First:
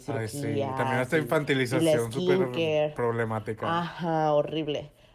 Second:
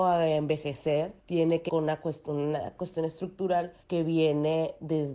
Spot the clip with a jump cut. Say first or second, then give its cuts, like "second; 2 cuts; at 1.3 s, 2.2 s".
second; 3 cuts; at 1.2 s, 1.7 s, 3.8 s